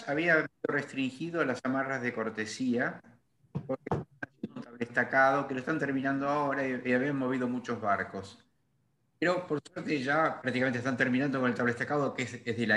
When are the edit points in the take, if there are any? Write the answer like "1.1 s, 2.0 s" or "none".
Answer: none